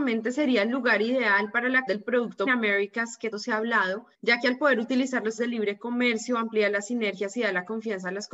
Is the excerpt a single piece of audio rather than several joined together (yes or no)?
no